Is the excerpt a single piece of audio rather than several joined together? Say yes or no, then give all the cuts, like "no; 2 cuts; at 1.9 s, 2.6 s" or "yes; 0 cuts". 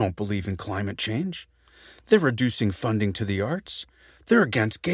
yes; 0 cuts